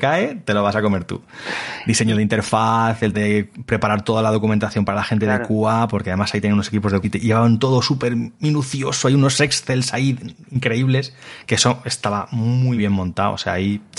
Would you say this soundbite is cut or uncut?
cut